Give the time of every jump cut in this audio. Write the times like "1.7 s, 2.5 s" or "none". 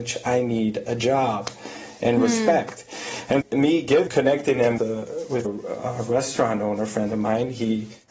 3.4 s, 4.1 s, 4.8 s, 5.4 s